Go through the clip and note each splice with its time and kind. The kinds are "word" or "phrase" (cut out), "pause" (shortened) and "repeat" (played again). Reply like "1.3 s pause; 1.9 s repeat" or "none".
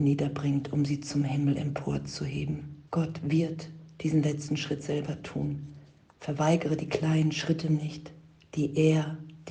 2.9 s pause